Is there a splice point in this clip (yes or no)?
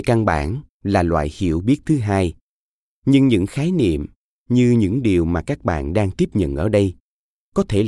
no